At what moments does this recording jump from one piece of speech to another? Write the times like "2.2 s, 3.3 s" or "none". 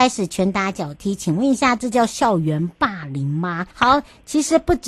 3.7 s